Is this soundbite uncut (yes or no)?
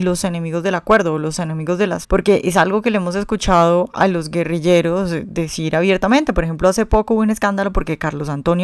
no